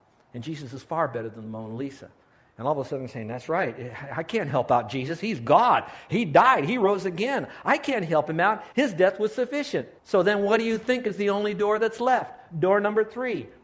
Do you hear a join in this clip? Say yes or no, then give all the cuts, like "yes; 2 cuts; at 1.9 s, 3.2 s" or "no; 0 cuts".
yes; 2 cuts; at 8.7 s, 10.0 s